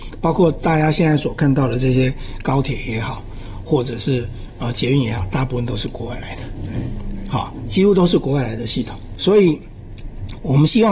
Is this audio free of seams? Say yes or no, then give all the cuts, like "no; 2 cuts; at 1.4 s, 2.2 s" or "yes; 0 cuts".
yes; 0 cuts